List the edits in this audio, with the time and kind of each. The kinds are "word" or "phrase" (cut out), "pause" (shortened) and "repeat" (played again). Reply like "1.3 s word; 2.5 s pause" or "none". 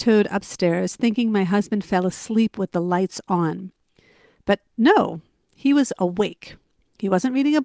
none